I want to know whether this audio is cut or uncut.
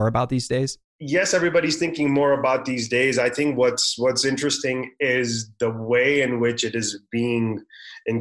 uncut